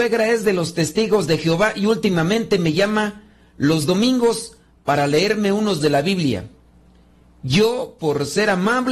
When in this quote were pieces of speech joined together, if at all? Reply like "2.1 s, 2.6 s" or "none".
5.8 s